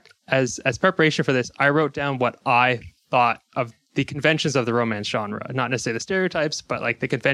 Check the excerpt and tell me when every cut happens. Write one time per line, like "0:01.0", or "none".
0:03.5